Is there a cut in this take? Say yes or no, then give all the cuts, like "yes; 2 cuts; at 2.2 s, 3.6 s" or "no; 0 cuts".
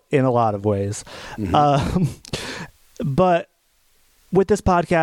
no; 0 cuts